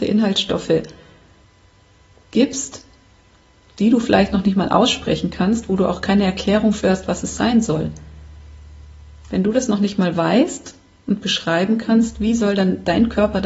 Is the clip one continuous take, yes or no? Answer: yes